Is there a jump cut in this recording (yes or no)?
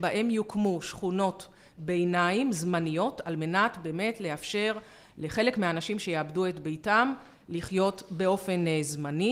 no